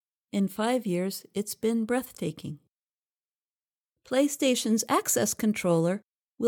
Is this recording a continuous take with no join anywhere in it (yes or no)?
yes